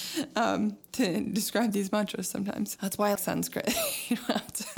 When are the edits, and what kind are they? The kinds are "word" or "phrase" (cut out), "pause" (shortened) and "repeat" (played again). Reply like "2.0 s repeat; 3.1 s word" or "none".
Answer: 2.8 s word; 3.2 s word